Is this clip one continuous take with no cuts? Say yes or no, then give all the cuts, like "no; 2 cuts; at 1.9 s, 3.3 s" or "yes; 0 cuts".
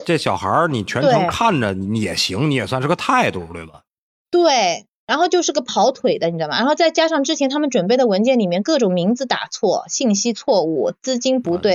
yes; 0 cuts